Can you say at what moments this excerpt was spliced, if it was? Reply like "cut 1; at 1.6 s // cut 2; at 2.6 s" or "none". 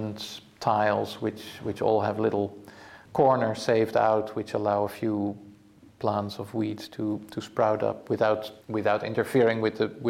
cut 1; at 3.1 s // cut 2; at 8.6 s